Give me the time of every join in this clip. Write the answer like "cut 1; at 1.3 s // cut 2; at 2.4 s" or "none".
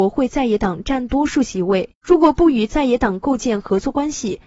cut 1; at 1.9 s

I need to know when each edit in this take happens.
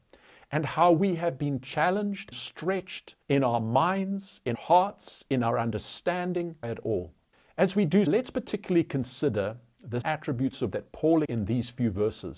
cut 1; at 2.3 s // cut 2; at 3.2 s // cut 3; at 4.5 s // cut 4; at 6.6 s // cut 5; at 7.3 s // cut 6; at 8.1 s // cut 7; at 10.0 s // cut 8; at 10.7 s // cut 9; at 11.3 s

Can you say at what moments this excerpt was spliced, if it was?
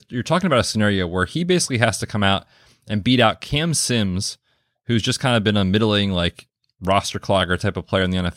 none

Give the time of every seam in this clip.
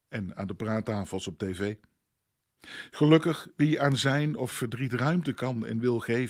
cut 1; at 4.5 s

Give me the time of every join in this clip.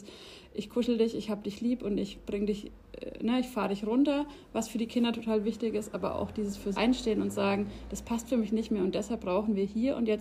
cut 1; at 6.7 s

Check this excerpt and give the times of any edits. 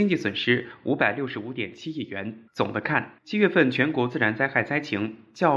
cut 1; at 2.5 s // cut 2; at 3.2 s

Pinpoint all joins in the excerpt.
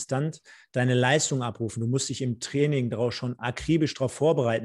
none

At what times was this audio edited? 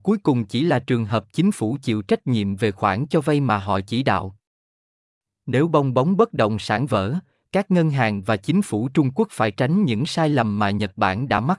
none

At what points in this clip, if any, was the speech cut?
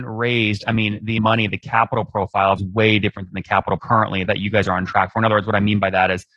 cut 1; at 1.2 s // cut 2; at 2.6 s // cut 3; at 3.8 s // cut 4; at 4.3 s

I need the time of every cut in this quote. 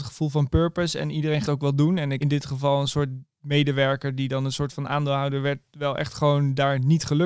cut 1; at 1.4 s // cut 2; at 2.2 s

